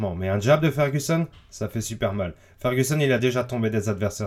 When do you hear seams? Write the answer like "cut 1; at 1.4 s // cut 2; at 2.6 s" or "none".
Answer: none